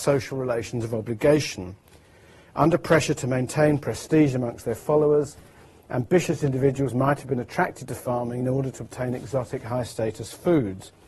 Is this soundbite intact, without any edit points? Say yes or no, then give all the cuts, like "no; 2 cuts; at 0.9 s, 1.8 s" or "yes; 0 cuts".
yes; 0 cuts